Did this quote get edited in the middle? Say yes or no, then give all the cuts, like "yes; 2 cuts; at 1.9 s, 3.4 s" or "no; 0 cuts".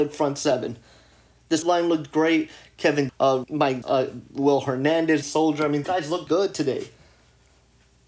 yes; 7 cuts; at 1.6 s, 3.1 s, 3.4 s, 3.8 s, 5.2 s, 5.8 s, 6.3 s